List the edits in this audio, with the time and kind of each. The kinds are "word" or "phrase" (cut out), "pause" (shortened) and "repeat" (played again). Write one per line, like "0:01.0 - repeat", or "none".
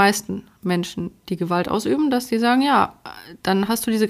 none